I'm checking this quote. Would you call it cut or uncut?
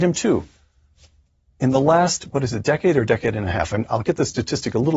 uncut